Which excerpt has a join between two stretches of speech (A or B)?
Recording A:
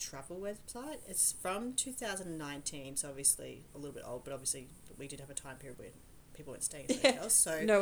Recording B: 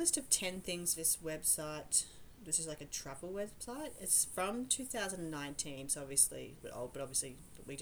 B